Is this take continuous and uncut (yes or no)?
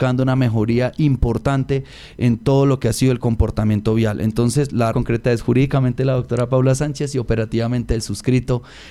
no